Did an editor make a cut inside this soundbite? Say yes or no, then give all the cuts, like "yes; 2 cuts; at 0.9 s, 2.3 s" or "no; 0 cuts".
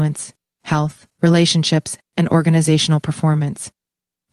yes; 1 cut; at 1.1 s